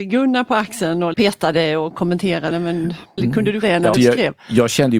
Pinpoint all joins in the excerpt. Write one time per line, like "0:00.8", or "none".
0:01.1
0:02.5
0:03.2
0:03.6
0:03.9